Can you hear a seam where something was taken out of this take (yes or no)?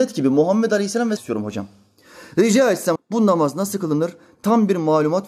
yes